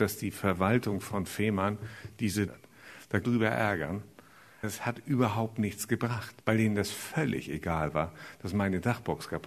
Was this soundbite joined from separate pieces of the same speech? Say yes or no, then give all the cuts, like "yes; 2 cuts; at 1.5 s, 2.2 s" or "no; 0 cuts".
yes; 4 cuts; at 2.5 s, 3.2 s, 4.6 s, 6.4 s